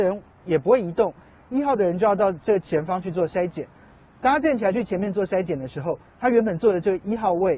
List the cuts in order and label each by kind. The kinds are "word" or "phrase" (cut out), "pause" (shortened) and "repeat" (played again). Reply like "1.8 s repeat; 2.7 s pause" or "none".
6.1 s pause